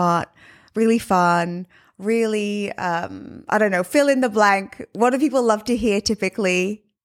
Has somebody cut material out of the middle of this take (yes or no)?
no